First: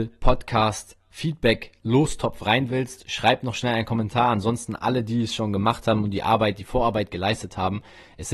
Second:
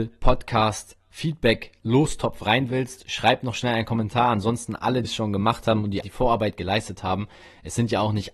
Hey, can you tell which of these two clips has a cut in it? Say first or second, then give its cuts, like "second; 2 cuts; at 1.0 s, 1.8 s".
second; 2 cuts; at 5.0 s, 6.0 s